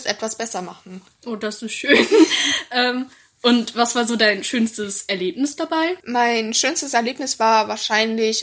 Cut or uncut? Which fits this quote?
cut